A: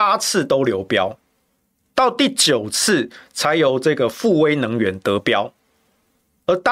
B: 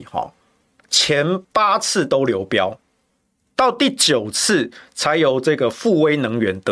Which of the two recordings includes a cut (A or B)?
B